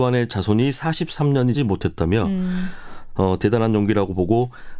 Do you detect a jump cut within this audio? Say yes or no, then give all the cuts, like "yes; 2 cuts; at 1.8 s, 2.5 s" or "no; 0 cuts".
yes; 1 cut; at 1.5 s